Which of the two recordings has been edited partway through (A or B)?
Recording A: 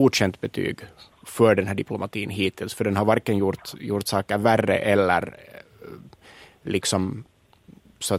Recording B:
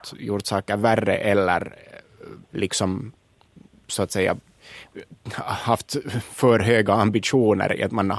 B